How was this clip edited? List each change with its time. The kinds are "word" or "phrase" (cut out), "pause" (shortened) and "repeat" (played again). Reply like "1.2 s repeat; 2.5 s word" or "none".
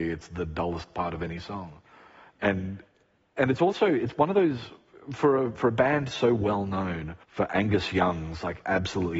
7.2 s pause